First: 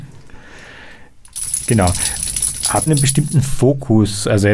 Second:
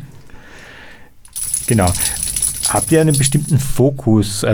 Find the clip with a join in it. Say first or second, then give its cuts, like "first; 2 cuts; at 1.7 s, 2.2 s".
first; 1 cut; at 2.9 s